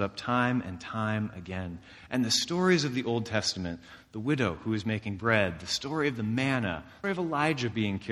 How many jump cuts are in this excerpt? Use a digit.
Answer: 1